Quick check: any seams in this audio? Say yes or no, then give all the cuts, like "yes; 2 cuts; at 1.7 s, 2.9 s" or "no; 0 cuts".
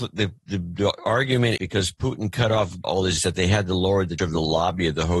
yes; 4 cuts; at 1.6 s, 2.8 s, 3.2 s, 4.2 s